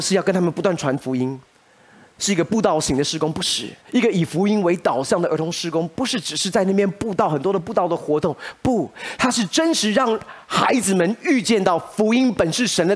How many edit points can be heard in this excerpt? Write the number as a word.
one